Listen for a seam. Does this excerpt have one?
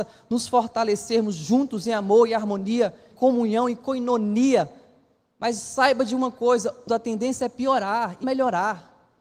yes; 3 cuts; at 3.1 s, 6.9 s, 8.2 s

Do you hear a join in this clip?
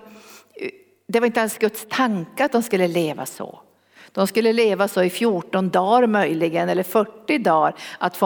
no; 0 cuts

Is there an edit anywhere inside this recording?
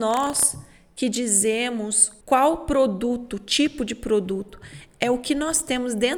yes; 1 cut; at 2.2 s

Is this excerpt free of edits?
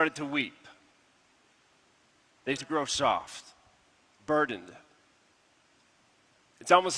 no; 1 cut; at 2.6 s

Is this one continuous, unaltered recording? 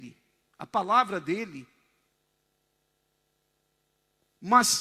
yes; 0 cuts

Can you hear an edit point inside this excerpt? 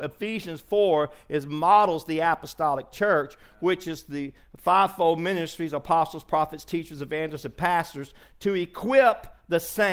no; 0 cuts

